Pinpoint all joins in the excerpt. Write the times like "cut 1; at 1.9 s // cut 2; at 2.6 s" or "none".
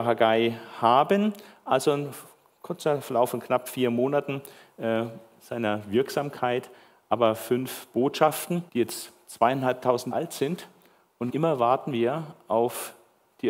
cut 1; at 8.7 s // cut 2; at 10.1 s // cut 3; at 11.3 s